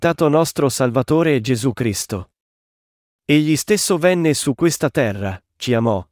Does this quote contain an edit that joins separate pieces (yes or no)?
no